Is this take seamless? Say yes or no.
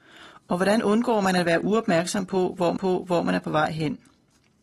no